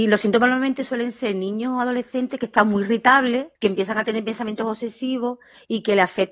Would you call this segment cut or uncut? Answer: cut